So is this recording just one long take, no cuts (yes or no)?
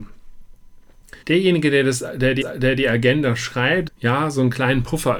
no